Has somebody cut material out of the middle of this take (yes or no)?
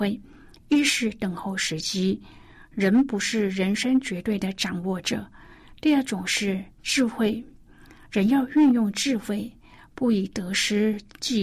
yes